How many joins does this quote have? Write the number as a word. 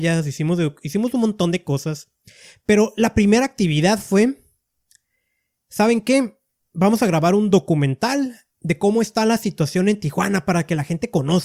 zero